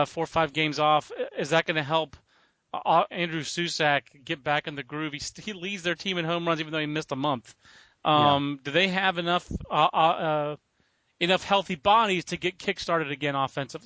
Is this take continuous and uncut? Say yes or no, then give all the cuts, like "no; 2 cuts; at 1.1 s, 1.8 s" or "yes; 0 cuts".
no; 1 cut; at 3.1 s